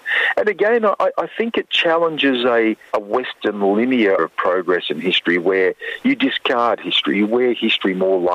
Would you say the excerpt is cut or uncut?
cut